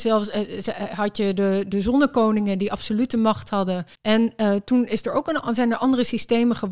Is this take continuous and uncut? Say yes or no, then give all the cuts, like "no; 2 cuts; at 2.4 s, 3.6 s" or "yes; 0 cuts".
no; 1 cut; at 3.9 s